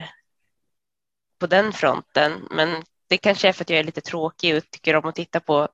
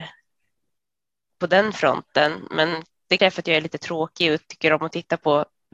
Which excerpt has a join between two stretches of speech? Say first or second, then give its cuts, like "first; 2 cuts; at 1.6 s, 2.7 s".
second; 1 cut; at 3.2 s